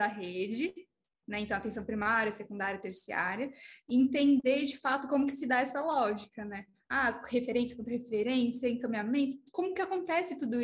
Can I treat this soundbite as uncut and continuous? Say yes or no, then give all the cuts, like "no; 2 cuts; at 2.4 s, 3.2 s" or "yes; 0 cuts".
yes; 0 cuts